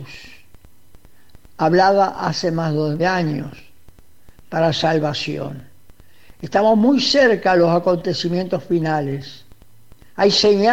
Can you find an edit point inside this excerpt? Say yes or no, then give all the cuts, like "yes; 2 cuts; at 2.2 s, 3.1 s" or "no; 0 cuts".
yes; 1 cut; at 3.0 s